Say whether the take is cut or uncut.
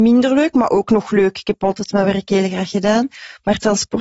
uncut